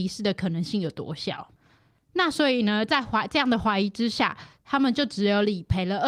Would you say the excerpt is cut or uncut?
uncut